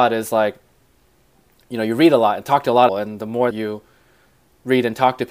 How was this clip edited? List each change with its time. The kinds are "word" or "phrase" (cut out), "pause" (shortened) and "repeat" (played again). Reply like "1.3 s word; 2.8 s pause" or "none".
2.9 s phrase; 3.5 s word